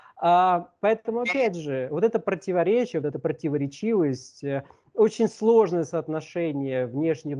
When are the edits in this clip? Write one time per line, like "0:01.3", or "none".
none